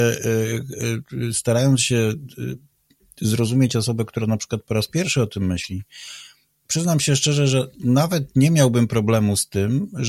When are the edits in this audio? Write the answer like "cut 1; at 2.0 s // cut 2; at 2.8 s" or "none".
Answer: cut 1; at 6.6 s